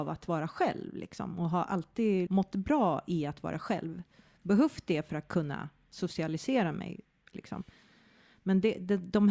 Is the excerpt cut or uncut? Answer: cut